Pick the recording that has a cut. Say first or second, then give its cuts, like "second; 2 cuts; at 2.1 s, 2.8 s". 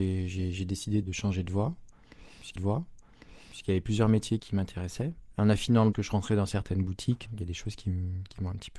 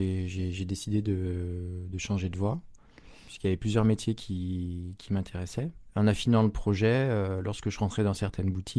first; 5 cuts; at 1.0 s, 2.6 s, 4.4 s, 5.9 s, 7.3 s